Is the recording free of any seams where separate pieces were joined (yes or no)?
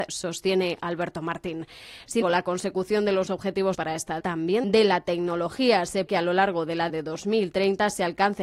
no